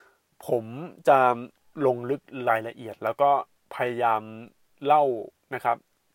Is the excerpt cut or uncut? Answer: uncut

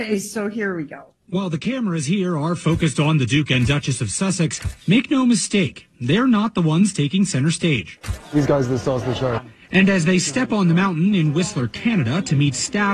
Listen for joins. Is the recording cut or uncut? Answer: cut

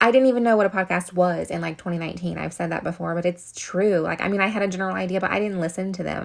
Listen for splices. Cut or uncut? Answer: uncut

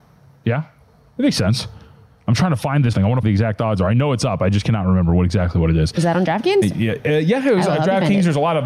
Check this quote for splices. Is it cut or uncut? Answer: cut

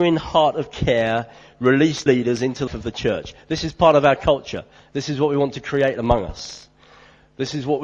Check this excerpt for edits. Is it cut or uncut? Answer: cut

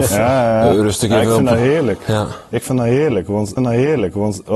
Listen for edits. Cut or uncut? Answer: cut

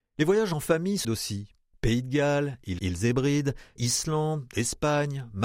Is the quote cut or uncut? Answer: cut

